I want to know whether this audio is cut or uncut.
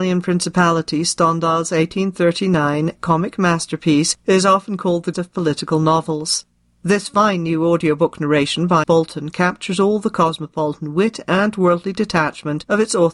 cut